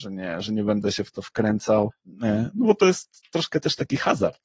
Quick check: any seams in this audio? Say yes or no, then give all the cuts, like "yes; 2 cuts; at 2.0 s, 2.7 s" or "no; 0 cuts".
no; 0 cuts